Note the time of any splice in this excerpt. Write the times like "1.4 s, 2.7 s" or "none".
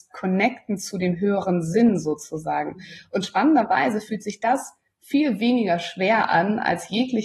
none